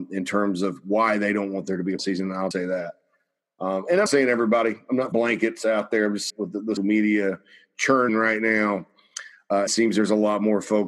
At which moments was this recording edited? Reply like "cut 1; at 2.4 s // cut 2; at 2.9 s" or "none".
cut 1; at 2.0 s // cut 2; at 2.5 s // cut 3; at 4.1 s // cut 4; at 5.1 s // cut 5; at 6.3 s // cut 6; at 6.8 s // cut 7; at 8.1 s // cut 8; at 9.7 s